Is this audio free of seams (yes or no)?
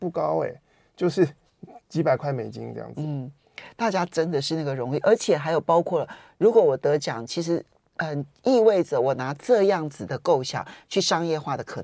yes